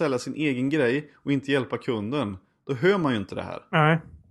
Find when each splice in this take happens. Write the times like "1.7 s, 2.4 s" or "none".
none